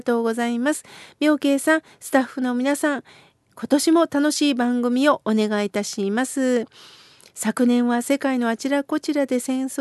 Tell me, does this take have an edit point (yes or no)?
no